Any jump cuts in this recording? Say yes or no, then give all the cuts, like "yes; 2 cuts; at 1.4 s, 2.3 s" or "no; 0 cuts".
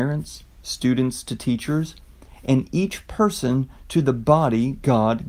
no; 0 cuts